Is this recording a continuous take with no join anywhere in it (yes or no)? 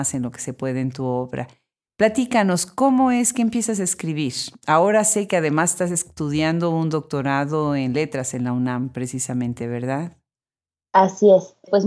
yes